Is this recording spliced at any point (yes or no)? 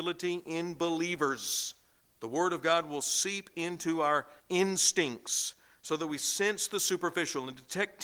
yes